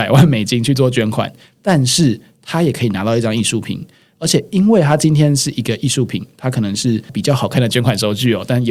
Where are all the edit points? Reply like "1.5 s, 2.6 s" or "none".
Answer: none